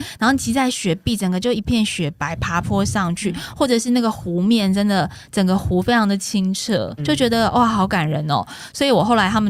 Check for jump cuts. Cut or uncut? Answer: cut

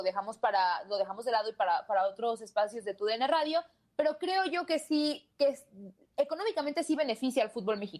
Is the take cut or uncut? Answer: uncut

